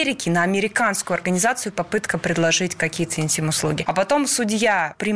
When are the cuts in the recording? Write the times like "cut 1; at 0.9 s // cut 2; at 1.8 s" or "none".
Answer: none